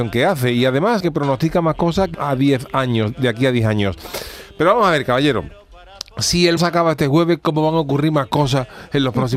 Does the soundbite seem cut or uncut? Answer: cut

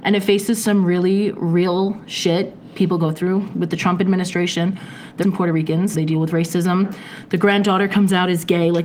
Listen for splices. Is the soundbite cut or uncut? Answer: cut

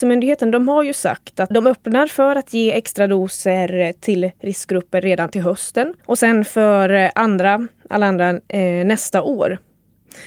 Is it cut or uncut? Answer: cut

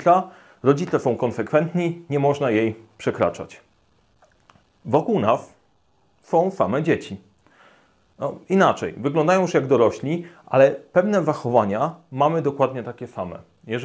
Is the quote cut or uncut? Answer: uncut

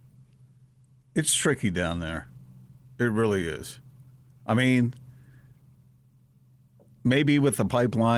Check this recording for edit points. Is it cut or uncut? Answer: uncut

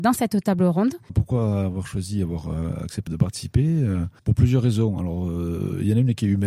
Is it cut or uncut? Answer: cut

